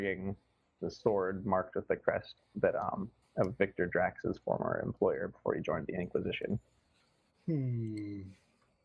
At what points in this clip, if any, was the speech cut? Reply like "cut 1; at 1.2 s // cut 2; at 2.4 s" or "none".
none